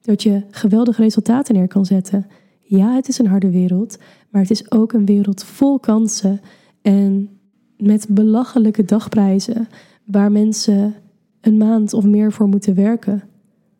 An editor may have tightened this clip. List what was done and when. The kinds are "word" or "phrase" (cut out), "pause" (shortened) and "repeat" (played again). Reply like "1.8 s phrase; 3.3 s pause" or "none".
none